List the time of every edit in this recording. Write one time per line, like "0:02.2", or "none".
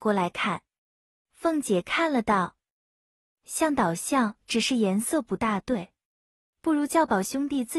0:04.4